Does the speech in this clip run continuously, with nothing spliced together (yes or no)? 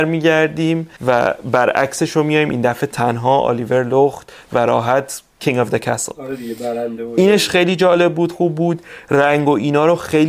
no